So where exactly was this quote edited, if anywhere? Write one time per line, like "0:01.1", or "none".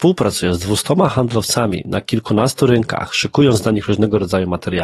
none